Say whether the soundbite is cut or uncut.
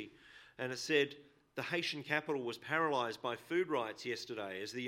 uncut